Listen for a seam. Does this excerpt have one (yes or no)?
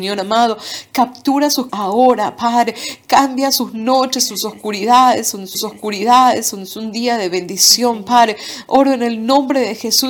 yes